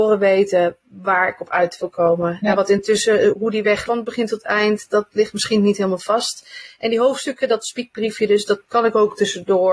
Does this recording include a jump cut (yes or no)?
yes